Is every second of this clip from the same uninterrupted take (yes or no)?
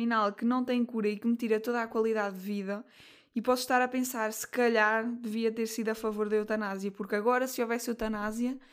yes